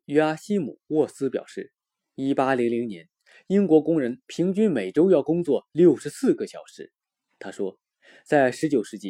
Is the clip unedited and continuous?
yes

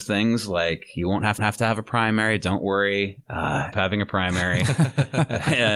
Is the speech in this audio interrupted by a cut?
yes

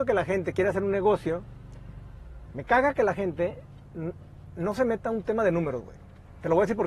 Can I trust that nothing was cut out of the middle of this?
yes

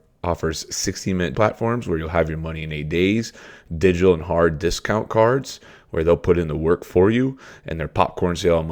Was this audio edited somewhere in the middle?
yes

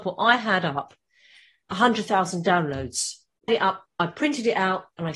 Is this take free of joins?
no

